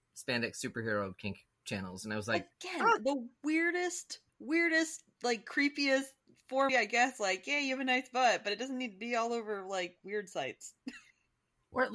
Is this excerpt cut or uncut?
cut